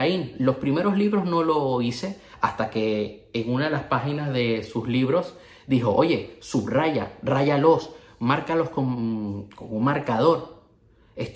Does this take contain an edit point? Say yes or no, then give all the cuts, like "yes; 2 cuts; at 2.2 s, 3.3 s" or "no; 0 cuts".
no; 0 cuts